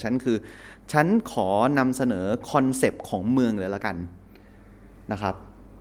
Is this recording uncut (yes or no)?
yes